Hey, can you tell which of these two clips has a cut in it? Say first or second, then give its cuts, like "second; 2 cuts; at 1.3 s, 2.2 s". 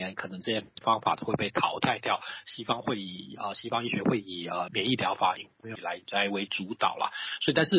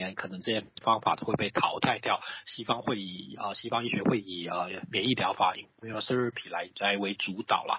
first; 2 cuts; at 4.7 s, 5.8 s